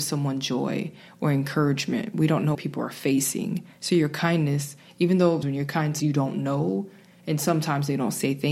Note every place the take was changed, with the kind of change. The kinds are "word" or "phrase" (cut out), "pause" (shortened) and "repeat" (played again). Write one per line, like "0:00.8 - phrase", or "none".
0:02.5 - word
0:05.4 - word
0:06.0 - word